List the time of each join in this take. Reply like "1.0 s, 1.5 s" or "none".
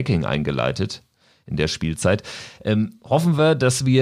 none